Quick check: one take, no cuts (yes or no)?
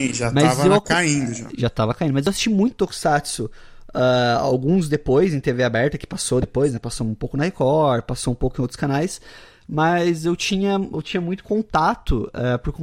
yes